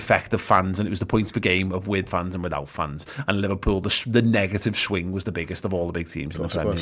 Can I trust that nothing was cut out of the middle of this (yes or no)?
yes